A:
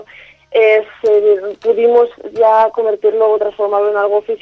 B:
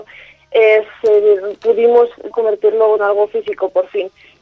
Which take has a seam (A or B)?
B